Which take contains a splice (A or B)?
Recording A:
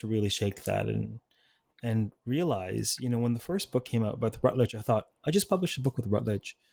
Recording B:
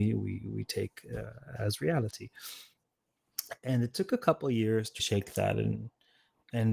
B